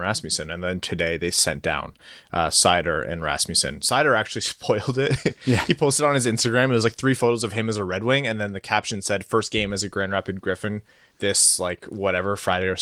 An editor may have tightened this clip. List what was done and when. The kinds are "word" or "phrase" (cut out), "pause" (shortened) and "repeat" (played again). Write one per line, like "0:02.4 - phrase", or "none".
none